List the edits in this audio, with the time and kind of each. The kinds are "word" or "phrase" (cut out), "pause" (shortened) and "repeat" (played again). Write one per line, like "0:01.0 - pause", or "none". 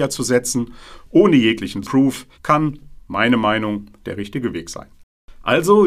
0:01.8 - word
0:02.3 - pause
0:04.0 - word